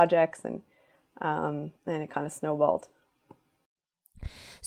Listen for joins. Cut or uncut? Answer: cut